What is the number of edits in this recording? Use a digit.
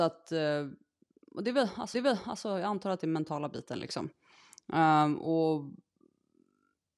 1